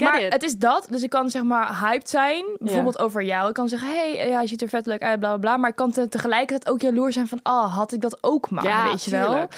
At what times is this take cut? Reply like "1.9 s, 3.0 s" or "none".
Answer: none